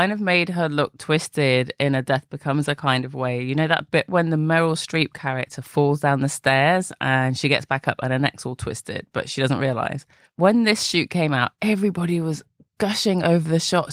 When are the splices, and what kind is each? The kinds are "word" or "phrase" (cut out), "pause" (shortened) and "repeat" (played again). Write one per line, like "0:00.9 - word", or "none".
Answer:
0:10.3 - pause